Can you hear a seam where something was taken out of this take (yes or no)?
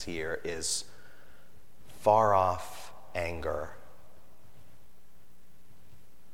no